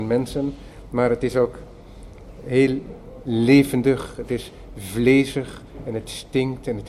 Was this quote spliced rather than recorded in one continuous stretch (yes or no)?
no